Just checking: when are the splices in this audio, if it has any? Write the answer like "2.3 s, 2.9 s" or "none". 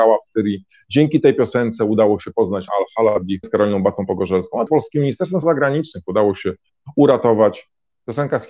2.7 s, 3.4 s, 4.7 s, 5.4 s